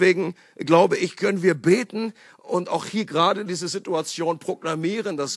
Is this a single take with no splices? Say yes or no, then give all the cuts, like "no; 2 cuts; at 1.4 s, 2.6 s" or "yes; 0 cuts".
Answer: yes; 0 cuts